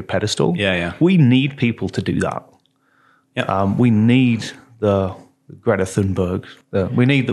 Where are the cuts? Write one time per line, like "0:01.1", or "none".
none